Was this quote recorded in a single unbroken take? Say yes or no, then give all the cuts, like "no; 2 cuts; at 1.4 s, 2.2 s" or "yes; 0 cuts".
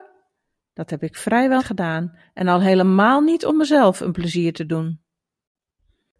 no; 1 cut; at 1.6 s